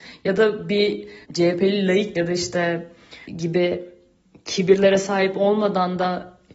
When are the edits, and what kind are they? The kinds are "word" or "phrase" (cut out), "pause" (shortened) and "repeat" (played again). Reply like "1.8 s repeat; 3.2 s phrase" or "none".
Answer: 1.2 s pause; 2.1 s word; 3.2 s phrase